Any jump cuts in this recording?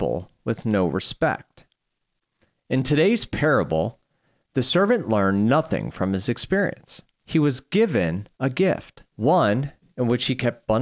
yes; 3 cuts; at 7.1 s, 8.3 s, 9.1 s

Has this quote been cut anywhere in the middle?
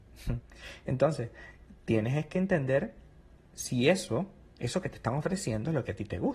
no; 0 cuts

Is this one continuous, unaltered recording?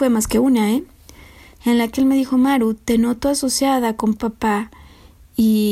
yes; 0 cuts

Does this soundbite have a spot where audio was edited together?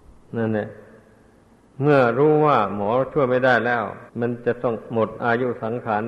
yes; 1 cut; at 4.1 s

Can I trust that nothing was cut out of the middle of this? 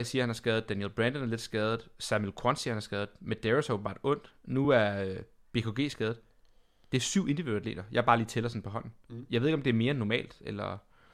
yes; 0 cuts

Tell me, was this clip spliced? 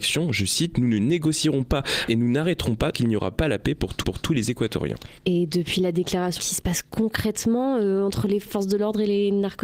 yes; 5 cuts; at 2.1 s, 2.9 s, 4.0 s, 5.2 s, 6.4 s

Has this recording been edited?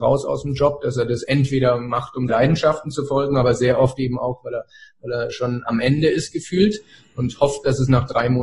yes; 1 cut; at 2.3 s

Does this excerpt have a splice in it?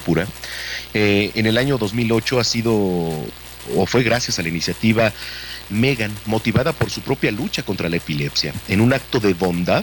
yes; 1 cut; at 5.7 s

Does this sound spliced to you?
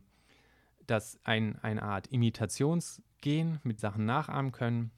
yes; 1 cut; at 3.8 s

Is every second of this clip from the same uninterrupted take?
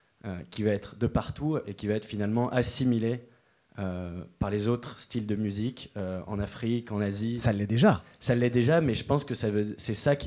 yes; 0 cuts

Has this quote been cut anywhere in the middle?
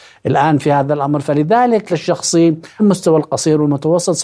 yes; 2 cuts; at 1.9 s, 2.8 s

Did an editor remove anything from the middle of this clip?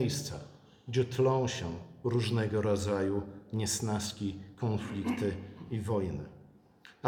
no; 0 cuts

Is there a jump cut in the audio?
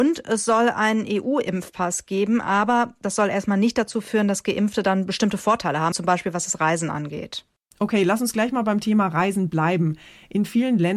yes; 1 cut; at 5.9 s

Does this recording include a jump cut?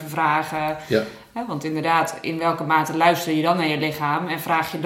no; 0 cuts

